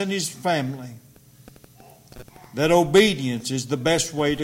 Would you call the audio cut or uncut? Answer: uncut